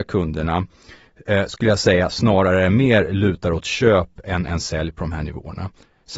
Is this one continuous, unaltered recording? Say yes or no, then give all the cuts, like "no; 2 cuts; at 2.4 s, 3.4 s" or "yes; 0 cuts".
yes; 0 cuts